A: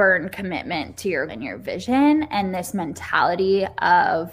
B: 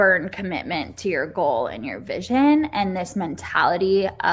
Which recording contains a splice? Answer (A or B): A